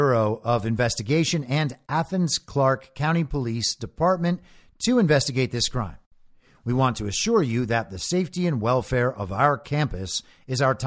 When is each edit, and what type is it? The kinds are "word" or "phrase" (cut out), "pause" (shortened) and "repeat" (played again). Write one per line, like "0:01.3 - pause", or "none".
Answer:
none